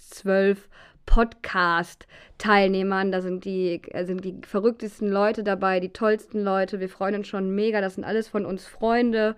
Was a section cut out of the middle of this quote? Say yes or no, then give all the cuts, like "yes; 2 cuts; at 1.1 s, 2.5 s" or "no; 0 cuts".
no; 0 cuts